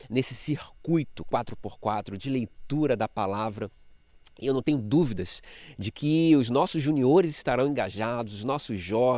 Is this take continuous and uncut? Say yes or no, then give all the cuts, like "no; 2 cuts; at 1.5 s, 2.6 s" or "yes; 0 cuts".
yes; 0 cuts